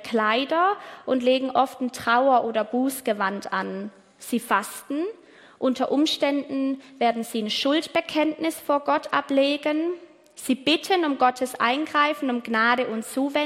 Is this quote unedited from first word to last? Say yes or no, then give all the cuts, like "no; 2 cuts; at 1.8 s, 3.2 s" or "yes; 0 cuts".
yes; 0 cuts